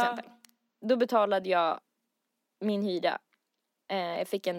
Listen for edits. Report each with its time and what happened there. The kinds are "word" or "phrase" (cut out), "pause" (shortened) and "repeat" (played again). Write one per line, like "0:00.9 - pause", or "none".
none